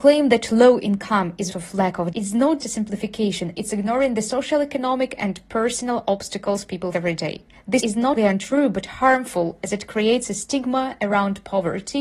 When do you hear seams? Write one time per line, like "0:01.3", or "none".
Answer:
0:01.5
0:02.1
0:02.6
0:06.9
0:07.8
0:08.2